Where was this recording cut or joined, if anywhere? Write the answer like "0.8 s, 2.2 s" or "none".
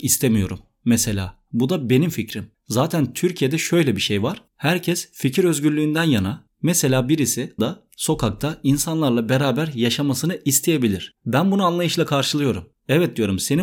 7.6 s

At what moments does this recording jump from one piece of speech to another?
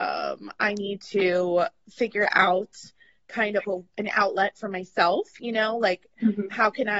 none

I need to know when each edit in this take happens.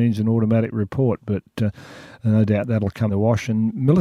3.1 s

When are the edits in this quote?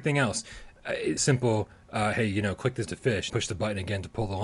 1.2 s, 2.9 s, 3.3 s

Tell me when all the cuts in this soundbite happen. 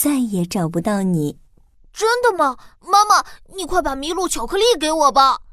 1.4 s, 2.8 s

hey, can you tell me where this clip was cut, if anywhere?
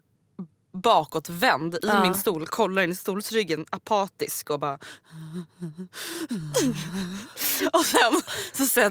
none

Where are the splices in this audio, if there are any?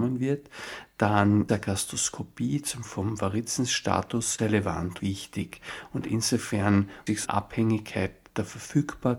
1.5 s, 2.8 s, 4.4 s, 5.0 s, 7.1 s

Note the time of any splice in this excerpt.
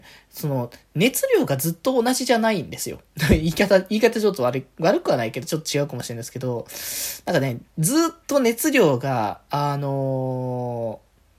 7.7 s

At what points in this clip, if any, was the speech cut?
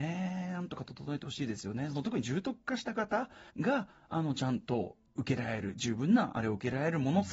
3.5 s

